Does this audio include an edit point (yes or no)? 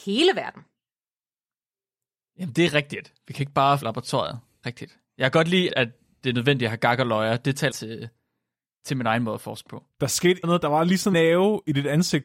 yes